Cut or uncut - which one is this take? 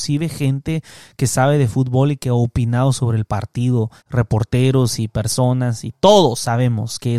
cut